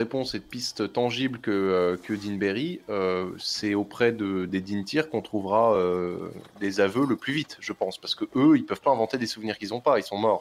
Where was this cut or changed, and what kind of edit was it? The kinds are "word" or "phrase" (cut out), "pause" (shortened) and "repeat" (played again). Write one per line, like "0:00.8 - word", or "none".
none